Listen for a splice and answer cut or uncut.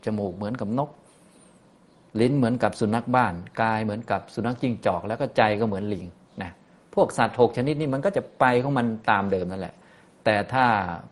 uncut